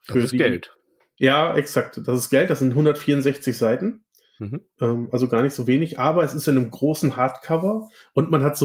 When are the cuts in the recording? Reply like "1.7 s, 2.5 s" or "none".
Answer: none